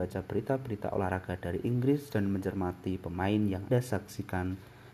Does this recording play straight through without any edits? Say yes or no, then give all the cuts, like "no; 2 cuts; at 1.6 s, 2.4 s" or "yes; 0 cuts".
no; 1 cut; at 3.7 s